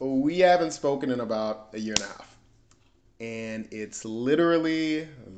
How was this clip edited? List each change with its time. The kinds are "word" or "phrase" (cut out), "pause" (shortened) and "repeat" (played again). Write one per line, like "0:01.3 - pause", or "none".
none